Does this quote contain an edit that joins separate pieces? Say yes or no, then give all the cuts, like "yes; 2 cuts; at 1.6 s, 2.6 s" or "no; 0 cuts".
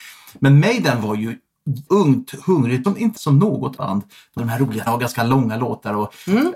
yes; 6 cuts; at 1.9 s, 2.8 s, 3.1 s, 3.8 s, 4.4 s, 4.9 s